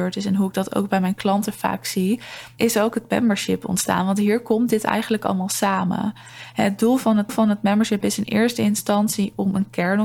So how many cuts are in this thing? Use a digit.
1